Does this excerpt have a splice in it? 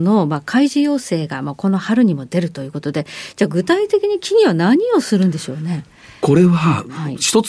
no; 0 cuts

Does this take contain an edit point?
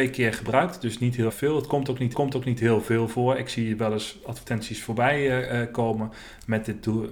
yes; 2 cuts; at 1.3 s, 2.1 s

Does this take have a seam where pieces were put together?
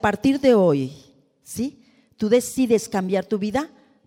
no; 0 cuts

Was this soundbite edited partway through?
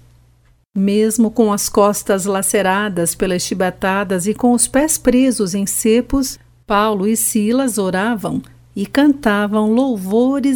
no; 0 cuts

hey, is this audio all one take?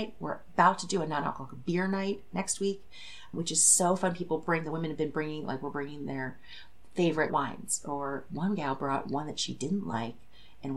no; 2 cuts; at 3.3 s, 7.3 s

